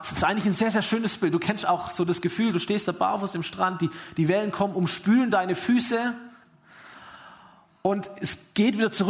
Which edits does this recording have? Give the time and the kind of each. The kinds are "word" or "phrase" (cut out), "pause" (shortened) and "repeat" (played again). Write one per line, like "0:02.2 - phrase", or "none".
none